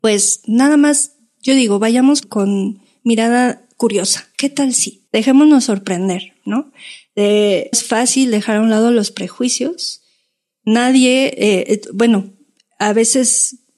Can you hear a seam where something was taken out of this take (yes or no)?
yes